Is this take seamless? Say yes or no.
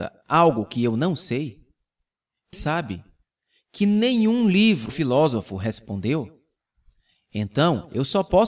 no